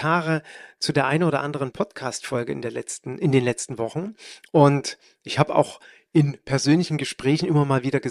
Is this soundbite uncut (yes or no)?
yes